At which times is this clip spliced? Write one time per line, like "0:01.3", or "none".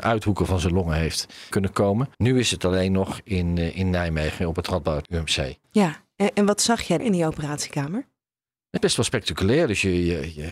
0:01.5
0:02.1
0:05.0
0:05.6
0:07.0
0:08.8